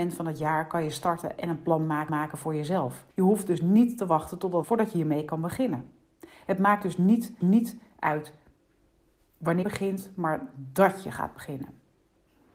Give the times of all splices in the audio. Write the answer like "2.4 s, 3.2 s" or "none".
2.1 s, 3.1 s, 4.6 s, 7.4 s, 9.6 s